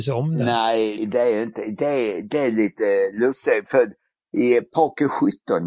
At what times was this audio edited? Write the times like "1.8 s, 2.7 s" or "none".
1.0 s